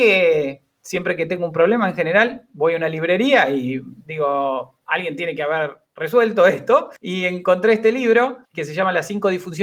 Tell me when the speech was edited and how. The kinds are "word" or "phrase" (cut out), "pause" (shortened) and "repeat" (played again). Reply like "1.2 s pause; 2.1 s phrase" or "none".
7.0 s pause; 8.4 s pause